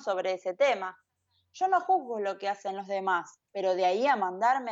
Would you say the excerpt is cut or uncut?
uncut